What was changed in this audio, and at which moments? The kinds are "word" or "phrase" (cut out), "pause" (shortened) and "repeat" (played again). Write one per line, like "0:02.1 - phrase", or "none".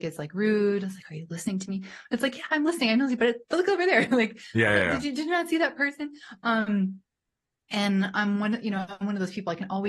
none